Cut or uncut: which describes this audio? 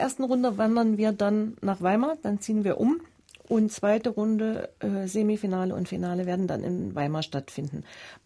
uncut